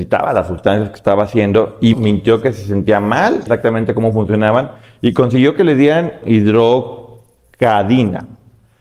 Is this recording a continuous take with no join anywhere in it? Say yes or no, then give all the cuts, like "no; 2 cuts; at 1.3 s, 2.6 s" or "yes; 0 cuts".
no; 3 cuts; at 1.9 s, 3.5 s, 6.2 s